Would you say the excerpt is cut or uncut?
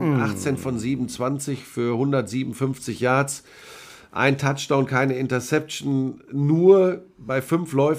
uncut